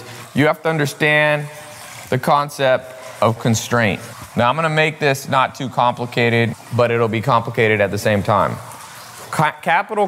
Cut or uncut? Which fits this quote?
cut